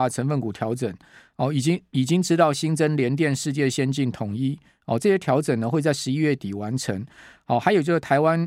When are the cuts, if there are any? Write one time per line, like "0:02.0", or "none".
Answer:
none